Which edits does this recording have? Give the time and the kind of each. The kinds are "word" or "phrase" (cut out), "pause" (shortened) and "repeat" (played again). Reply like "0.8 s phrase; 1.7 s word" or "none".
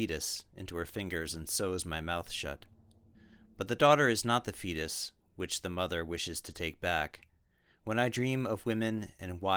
none